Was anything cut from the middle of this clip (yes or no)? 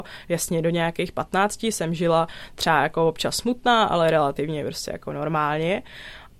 no